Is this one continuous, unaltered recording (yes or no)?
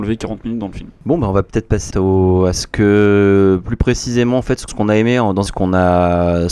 no